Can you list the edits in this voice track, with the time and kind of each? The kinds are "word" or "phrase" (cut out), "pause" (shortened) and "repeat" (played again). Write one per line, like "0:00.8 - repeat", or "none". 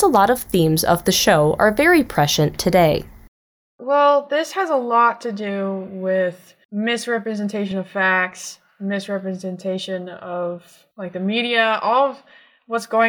none